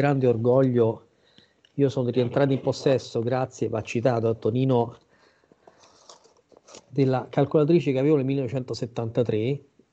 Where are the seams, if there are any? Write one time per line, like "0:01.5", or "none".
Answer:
none